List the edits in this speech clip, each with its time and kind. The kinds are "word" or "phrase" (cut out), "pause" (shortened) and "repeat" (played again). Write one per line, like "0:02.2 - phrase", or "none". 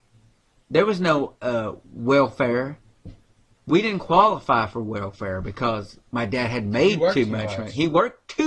none